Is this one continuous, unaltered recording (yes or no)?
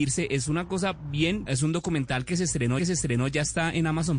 no